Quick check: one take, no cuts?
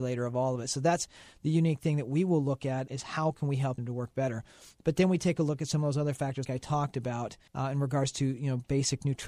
no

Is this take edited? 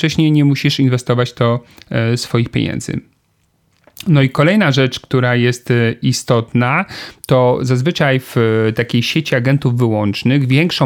no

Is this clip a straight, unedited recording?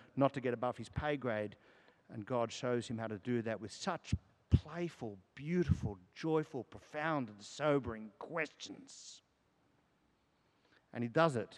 yes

